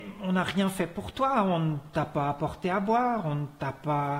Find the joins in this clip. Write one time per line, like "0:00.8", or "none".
none